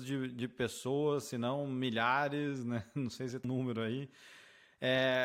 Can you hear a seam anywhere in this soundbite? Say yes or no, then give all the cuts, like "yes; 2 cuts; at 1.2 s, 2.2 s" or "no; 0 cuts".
yes; 1 cut; at 3.4 s